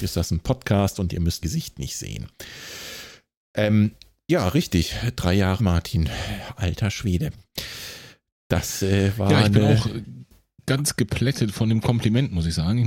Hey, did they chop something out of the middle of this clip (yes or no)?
yes